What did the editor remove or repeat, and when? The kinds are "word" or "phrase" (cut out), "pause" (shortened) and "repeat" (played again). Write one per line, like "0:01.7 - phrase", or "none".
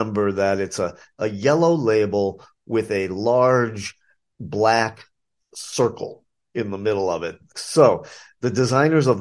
none